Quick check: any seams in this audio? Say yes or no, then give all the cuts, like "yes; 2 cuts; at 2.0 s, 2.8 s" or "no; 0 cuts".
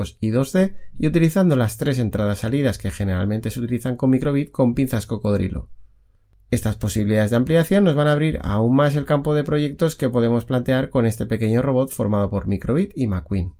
no; 0 cuts